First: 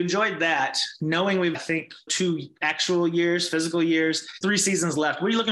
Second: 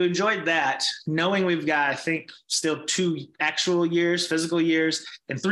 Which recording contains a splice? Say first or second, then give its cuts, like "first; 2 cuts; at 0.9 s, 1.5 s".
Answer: first; 3 cuts; at 1.5 s, 2.1 s, 4.4 s